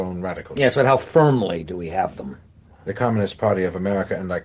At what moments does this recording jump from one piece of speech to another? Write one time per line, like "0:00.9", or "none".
none